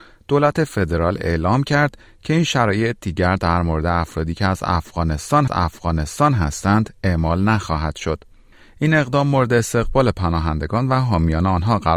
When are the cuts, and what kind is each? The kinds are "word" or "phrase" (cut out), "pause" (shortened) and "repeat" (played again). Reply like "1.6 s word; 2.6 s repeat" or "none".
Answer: 5.5 s repeat